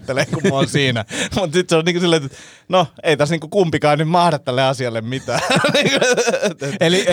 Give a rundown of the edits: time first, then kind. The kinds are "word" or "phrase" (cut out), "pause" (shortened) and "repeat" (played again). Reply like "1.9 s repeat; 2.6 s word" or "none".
none